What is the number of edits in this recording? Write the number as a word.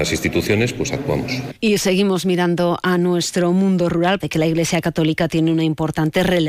two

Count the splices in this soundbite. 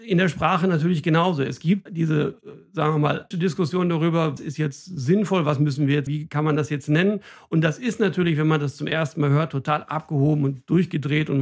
four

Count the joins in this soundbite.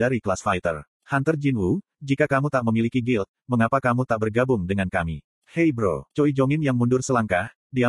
three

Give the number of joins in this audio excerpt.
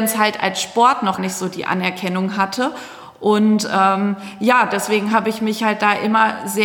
one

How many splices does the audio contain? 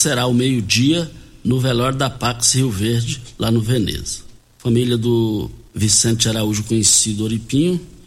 two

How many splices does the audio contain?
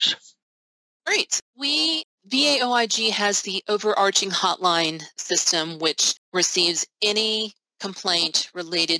one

